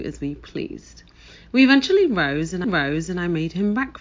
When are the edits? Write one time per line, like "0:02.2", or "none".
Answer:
0:02.6